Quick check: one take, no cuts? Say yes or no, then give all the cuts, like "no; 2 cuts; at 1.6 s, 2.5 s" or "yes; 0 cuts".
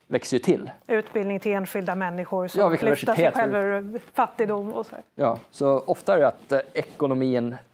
no; 1 cut; at 2.8 s